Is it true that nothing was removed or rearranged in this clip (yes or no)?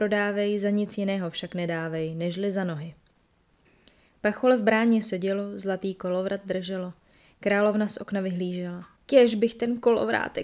no